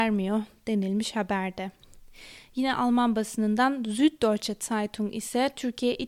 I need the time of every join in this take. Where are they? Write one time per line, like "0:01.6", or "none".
none